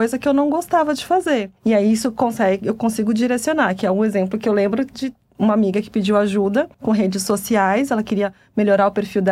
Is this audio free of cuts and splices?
no; 2 cuts; at 1.6 s, 6.7 s

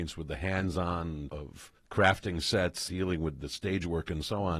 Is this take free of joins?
no; 3 cuts; at 1.3 s, 1.8 s, 2.9 s

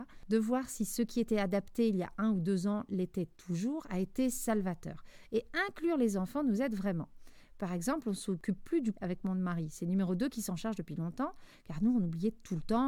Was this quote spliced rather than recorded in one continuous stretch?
yes; 1 cut; at 8.9 s

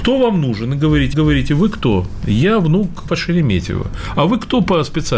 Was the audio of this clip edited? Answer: yes; 2 cuts; at 1.1 s, 3.1 s

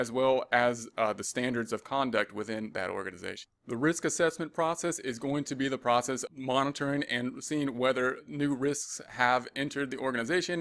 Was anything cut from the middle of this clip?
yes; 1 cut; at 6.3 s

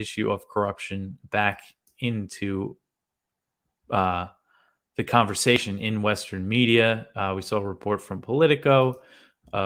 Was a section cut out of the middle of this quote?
no; 0 cuts

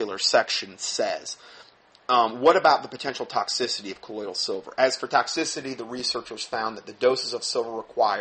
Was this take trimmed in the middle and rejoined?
no; 0 cuts

